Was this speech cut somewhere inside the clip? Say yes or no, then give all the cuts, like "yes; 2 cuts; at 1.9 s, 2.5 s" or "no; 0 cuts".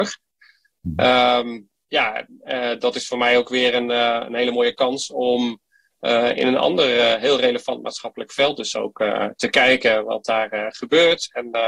no; 0 cuts